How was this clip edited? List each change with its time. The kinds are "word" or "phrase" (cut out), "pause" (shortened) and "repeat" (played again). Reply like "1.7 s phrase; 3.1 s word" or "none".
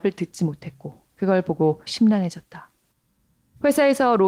1.1 s pause; 1.9 s word